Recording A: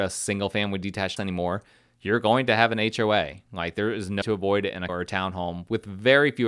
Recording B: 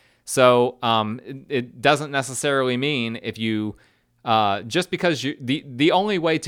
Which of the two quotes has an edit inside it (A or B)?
A